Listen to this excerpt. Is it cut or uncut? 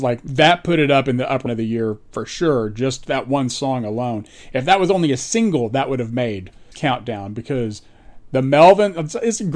cut